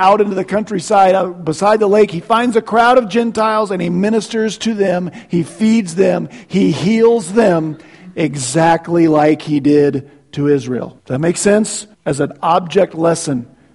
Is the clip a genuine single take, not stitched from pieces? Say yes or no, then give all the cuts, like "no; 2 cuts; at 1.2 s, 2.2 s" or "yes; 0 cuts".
no; 2 cuts; at 11.0 s, 11.9 s